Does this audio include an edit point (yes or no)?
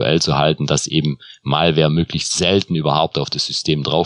no